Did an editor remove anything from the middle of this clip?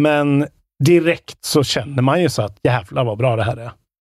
no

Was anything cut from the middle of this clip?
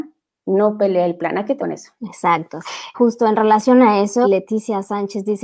yes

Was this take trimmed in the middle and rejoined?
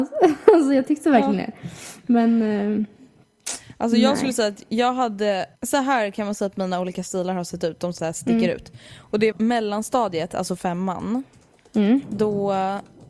yes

